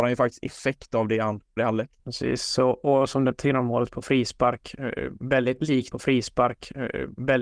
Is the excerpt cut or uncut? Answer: cut